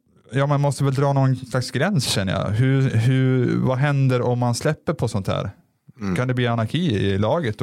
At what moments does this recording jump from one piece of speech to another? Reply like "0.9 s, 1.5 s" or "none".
none